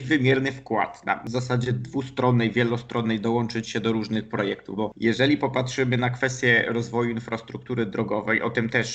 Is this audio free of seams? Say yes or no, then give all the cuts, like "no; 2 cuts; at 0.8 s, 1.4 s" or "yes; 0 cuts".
yes; 0 cuts